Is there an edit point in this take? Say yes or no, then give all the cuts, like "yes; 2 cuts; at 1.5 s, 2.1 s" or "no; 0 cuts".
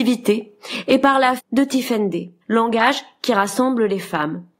yes; 2 cuts; at 1.4 s, 2.4 s